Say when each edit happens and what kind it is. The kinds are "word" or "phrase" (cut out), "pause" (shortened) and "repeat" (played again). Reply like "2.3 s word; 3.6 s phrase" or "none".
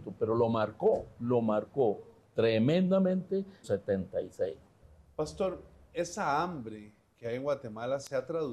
3.6 s phrase